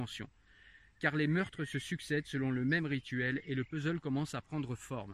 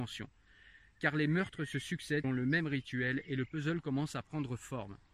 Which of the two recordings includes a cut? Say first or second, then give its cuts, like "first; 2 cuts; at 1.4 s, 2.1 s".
second; 1 cut; at 2.2 s